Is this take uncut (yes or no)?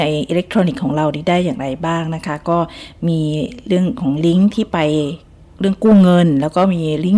yes